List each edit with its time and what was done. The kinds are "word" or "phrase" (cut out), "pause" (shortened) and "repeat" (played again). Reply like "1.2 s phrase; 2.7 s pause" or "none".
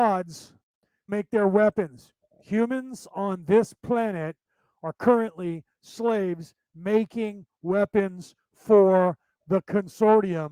1.1 s word